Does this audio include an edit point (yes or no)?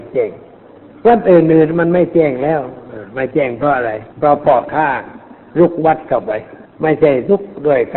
yes